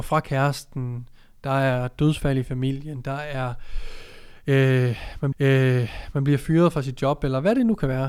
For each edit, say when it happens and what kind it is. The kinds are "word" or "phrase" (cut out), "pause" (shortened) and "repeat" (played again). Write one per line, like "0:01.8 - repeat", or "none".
0:05.3 - repeat